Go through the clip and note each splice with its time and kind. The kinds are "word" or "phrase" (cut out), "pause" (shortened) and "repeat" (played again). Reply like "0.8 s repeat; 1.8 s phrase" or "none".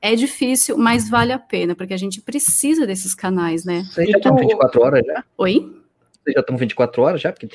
5.3 s pause